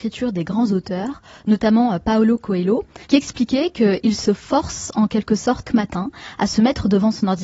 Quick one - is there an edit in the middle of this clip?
yes; 2 cuts; at 3.0 s, 5.7 s

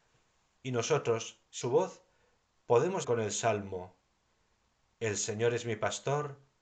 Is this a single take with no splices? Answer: no; 2 cuts; at 1.6 s, 3.0 s

